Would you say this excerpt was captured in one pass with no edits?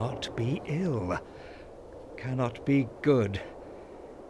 yes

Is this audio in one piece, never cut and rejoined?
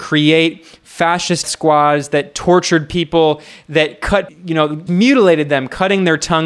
no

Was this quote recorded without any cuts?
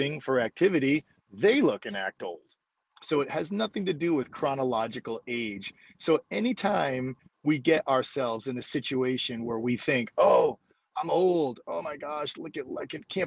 yes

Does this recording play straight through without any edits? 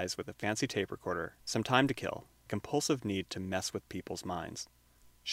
no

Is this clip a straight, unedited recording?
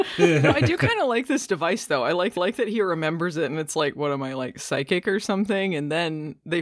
no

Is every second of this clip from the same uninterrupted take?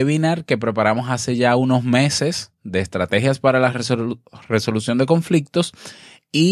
yes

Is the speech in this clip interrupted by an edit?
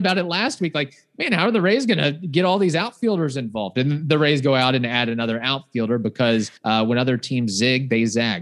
yes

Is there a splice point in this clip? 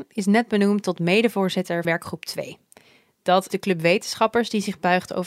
yes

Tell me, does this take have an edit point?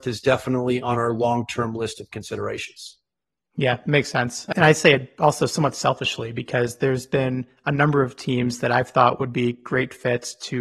no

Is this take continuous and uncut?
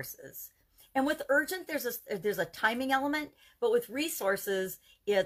yes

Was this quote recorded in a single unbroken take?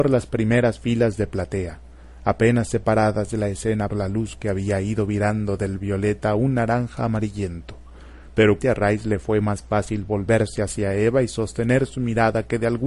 no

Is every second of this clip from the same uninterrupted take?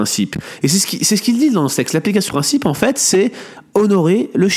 no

